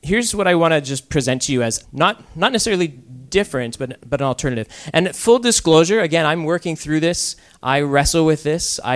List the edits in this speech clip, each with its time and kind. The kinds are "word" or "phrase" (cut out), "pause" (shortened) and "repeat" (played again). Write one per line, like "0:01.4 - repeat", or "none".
0:01.8 - word